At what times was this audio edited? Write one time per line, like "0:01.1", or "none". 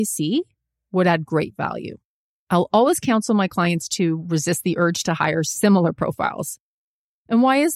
none